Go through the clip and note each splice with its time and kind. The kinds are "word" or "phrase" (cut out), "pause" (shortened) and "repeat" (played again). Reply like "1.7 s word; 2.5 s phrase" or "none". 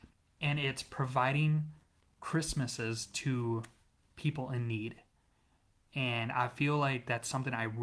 none